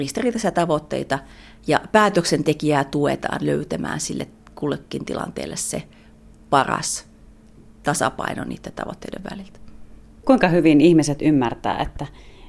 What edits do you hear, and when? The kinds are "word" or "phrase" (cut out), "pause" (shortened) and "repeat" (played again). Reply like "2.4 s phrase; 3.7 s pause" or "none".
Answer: none